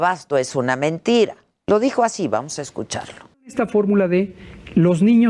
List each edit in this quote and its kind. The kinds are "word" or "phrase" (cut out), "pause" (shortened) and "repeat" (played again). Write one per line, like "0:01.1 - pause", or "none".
0:01.5 - pause